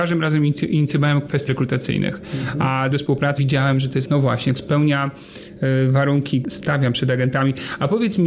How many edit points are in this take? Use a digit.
6